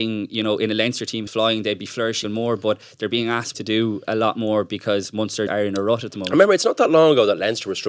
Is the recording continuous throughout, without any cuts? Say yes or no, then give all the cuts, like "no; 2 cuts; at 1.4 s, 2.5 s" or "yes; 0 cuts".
no; 4 cuts; at 1.3 s, 2.2 s, 3.5 s, 5.5 s